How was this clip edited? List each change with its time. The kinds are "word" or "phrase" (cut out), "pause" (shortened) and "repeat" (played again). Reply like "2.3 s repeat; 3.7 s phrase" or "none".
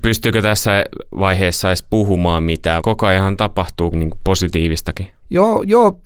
2.8 s word; 3.9 s word